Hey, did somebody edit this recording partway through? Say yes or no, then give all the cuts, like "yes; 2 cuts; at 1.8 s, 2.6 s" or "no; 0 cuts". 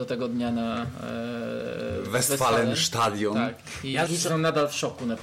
yes; 1 cut; at 4.1 s